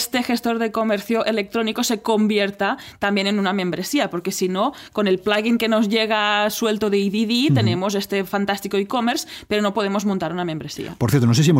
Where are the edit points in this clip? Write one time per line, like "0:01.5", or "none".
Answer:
none